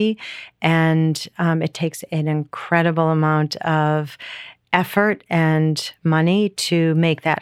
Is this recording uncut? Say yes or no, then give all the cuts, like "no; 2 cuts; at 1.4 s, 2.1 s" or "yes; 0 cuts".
yes; 0 cuts